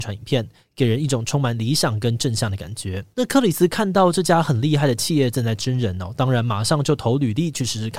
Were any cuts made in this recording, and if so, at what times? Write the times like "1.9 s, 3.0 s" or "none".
3.1 s